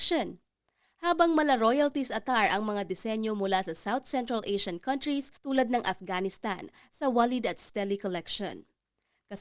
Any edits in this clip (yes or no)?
yes